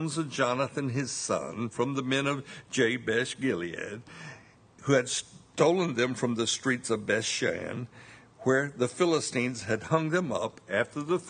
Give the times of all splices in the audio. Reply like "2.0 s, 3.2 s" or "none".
none

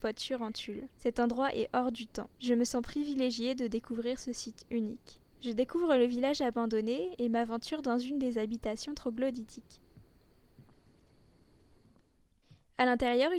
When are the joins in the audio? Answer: 0.9 s, 2.3 s, 5.3 s

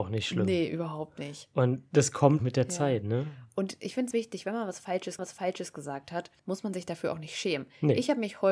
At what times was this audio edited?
2.4 s, 4.1 s, 5.2 s, 6.4 s

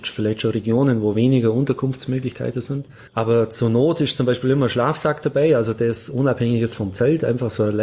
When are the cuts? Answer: 3.1 s

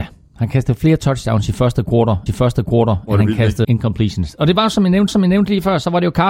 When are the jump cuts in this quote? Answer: 2.3 s, 3.6 s, 5.1 s

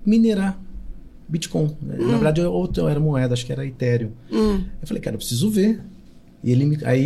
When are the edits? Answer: none

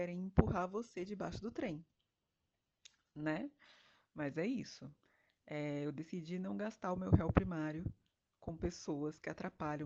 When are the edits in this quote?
none

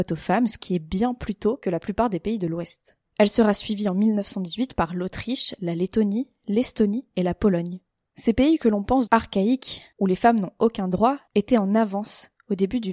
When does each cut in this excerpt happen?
9.1 s

